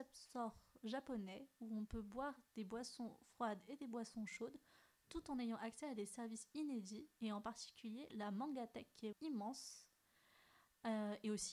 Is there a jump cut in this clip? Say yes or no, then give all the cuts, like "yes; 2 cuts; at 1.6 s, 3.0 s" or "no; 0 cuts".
yes; 1 cut; at 9.1 s